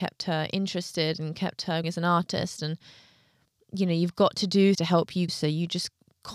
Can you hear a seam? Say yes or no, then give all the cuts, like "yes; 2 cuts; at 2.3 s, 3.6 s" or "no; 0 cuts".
yes; 3 cuts; at 1.8 s, 4.7 s, 5.3 s